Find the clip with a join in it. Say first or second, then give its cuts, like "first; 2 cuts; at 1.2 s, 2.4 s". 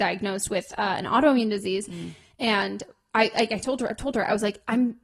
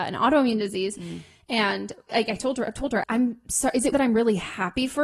second; 3 cuts; at 2.1 s, 3.0 s, 3.9 s